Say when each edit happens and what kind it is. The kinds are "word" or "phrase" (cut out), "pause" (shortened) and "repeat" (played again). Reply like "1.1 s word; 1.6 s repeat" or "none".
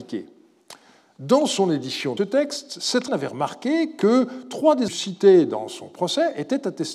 2.2 s word; 3.1 s word; 4.9 s word